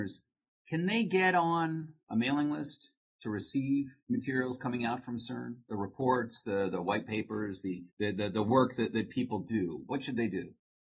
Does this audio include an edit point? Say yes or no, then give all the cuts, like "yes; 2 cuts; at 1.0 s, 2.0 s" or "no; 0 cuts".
yes; 3 cuts; at 2.0 s, 4.0 s, 7.9 s